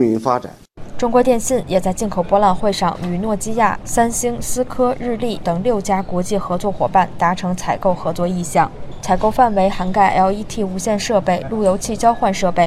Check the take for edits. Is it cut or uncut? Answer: cut